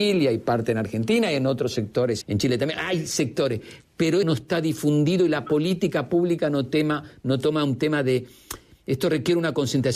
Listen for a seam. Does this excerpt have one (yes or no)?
yes